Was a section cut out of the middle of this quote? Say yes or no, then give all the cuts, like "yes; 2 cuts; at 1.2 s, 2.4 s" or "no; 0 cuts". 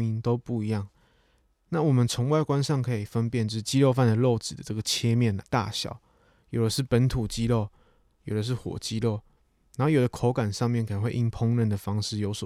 yes; 1 cut; at 5.4 s